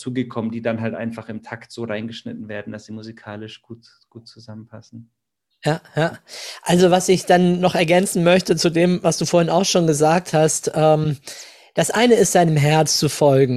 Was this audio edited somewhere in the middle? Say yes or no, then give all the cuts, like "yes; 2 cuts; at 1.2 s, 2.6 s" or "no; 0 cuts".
no; 0 cuts